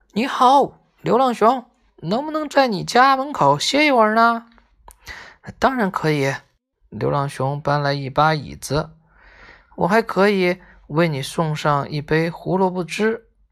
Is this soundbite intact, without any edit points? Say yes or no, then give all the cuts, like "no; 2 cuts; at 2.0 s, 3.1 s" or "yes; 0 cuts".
yes; 0 cuts